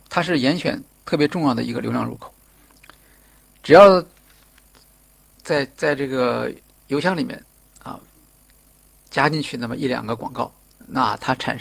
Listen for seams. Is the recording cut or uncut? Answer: uncut